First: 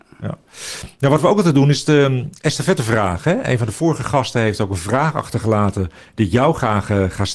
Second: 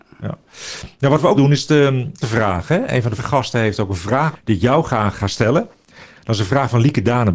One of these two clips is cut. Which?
second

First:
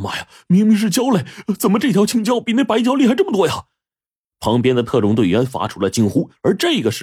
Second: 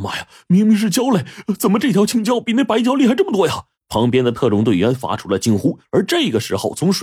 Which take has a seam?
second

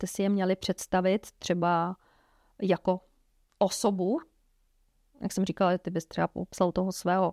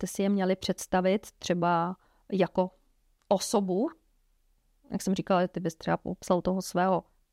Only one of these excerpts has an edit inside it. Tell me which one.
second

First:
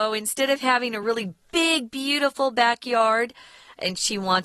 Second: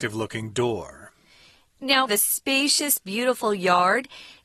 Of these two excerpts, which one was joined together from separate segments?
second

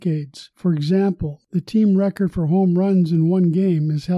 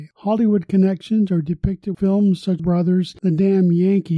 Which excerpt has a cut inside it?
second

